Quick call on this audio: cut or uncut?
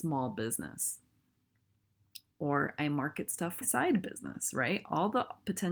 cut